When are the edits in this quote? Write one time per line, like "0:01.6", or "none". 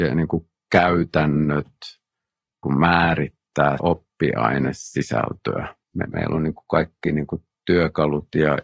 0:02.6
0:03.8
0:05.8